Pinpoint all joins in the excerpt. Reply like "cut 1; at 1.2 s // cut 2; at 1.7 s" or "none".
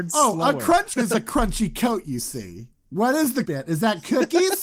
cut 1; at 1.0 s // cut 2; at 2.7 s // cut 3; at 3.4 s